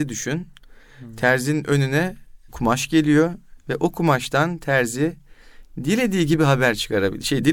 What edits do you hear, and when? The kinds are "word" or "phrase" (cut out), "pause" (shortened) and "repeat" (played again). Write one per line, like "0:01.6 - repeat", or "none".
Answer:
none